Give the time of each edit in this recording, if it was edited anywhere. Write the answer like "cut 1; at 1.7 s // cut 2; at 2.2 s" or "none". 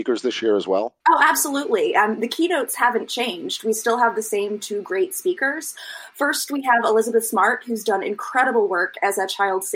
cut 1; at 1.0 s